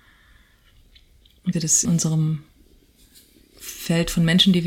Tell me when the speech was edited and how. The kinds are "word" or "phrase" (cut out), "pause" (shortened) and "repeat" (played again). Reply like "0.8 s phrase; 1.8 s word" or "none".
1.5 s word; 1.8 s word